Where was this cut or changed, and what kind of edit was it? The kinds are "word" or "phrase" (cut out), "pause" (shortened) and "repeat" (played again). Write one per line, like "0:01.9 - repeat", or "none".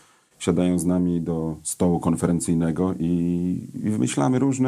none